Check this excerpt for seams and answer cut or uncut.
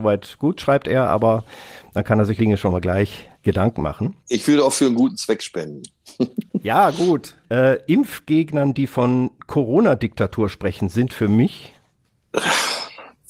cut